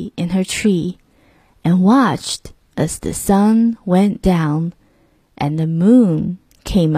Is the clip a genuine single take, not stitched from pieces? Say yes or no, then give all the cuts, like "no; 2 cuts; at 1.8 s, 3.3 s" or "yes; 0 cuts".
yes; 0 cuts